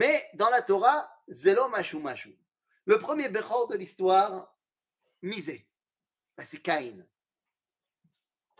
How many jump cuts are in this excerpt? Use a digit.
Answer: 0